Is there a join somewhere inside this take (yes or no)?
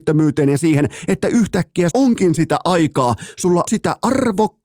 yes